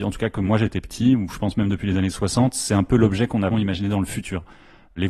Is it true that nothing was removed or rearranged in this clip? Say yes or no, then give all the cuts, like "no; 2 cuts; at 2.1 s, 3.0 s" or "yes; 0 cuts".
no; 1 cut; at 3.5 s